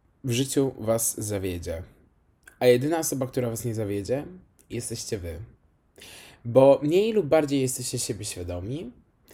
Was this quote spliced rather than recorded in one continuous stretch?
no; 0 cuts

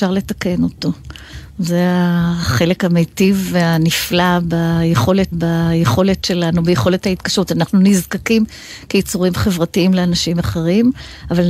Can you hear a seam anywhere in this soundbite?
yes; 1 cut; at 5.3 s

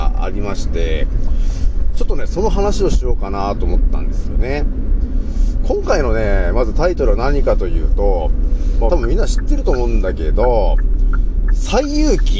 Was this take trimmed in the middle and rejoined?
yes; 1 cut; at 8.9 s

